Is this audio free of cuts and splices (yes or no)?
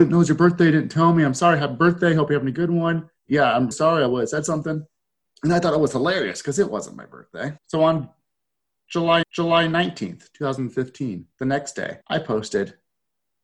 no